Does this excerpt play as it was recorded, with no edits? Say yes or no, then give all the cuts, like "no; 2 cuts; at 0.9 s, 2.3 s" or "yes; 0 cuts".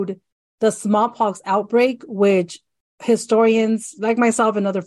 yes; 0 cuts